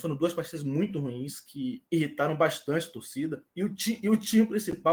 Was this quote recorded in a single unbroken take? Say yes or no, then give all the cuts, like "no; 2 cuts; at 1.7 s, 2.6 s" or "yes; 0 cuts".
no; 2 cuts; at 1.9 s, 3.5 s